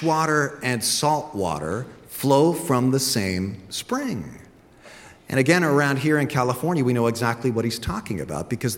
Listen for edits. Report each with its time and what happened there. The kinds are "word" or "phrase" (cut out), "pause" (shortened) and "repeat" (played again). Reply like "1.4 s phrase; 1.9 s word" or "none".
none